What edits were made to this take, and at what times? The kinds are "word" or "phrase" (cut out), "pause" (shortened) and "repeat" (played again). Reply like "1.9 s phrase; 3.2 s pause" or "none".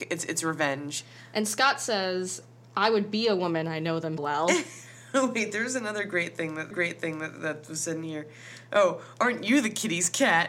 4.2 s word; 6.7 s repeat